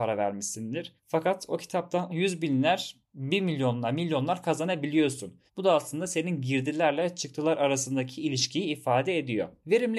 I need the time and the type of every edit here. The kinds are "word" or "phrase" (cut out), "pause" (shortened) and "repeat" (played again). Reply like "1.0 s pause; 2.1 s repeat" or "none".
1.0 s pause; 2.1 s phrase; 5.5 s pause